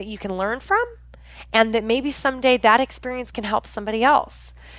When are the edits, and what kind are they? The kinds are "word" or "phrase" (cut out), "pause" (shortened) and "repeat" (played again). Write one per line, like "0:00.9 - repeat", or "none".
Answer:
none

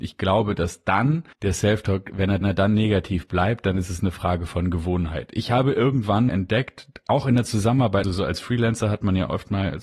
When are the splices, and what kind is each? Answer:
0:01.3 - pause
0:02.4 - repeat
0:06.3 - word
0:08.0 - word

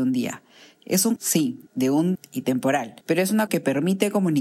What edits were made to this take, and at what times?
0:01.2 - word
0:01.7 - pause
0:02.2 - word
0:03.0 - pause
0:03.5 - word

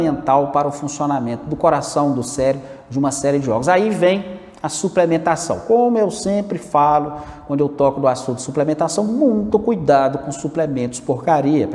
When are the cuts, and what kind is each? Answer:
none

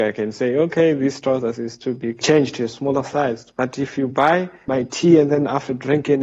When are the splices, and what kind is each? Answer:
none

